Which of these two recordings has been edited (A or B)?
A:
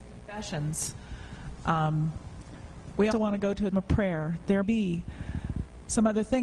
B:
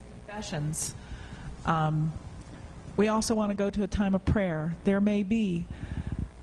A